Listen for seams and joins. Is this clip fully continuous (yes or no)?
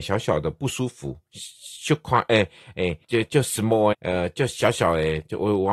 no